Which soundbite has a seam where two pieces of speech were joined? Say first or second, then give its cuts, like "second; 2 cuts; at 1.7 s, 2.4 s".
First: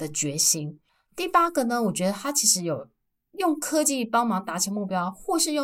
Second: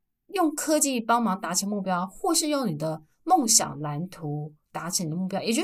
second; 1 cut; at 3.1 s